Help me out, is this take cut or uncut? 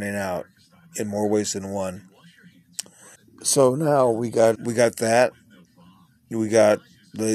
cut